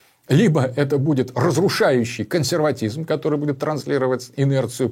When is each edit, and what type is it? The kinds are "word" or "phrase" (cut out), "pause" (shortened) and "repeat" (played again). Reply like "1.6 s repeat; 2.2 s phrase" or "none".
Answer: none